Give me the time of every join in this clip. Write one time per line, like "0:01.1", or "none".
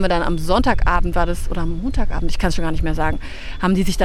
none